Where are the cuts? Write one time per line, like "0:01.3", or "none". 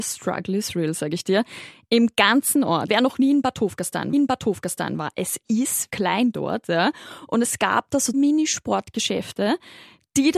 0:02.9
0:04.1
0:05.9
0:08.1